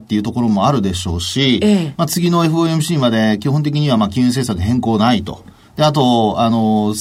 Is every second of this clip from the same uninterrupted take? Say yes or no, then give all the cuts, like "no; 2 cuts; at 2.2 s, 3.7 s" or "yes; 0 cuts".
yes; 0 cuts